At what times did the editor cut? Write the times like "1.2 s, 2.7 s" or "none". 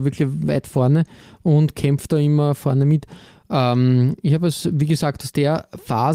none